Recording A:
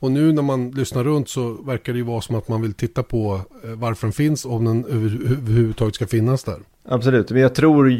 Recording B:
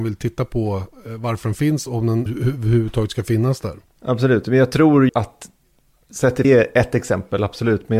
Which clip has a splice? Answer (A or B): B